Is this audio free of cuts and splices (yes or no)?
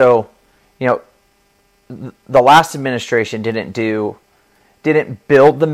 yes